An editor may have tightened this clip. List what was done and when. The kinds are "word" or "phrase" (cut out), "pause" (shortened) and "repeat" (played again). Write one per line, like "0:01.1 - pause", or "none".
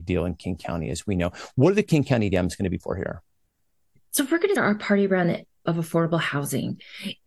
0:02.8 - word
0:04.6 - word
0:05.7 - word